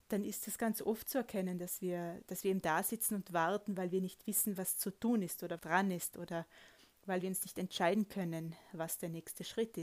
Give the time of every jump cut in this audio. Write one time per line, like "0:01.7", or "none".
0:05.6